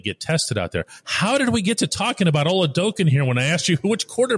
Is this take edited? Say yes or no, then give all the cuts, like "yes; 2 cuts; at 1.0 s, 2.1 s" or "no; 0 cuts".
no; 0 cuts